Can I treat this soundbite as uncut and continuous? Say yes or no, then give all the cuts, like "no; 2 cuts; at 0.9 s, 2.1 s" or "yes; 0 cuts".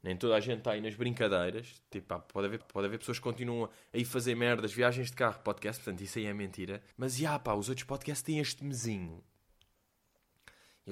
no; 2 cuts; at 2.6 s, 6.9 s